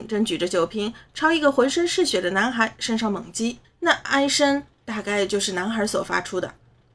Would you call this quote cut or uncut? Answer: cut